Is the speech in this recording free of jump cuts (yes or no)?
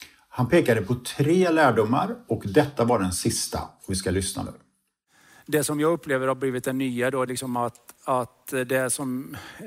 no